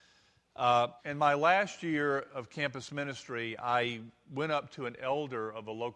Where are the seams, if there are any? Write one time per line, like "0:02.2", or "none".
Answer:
0:01.0